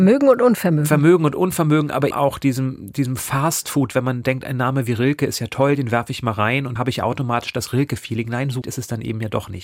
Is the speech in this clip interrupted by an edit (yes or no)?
yes